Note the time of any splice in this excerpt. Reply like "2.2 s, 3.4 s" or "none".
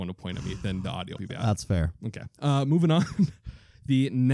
1.2 s